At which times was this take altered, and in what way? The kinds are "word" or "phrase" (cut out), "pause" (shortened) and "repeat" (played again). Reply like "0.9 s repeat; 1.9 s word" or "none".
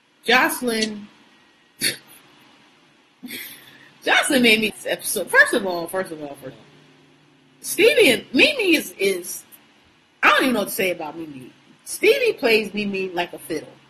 4.7 s word; 6.5 s word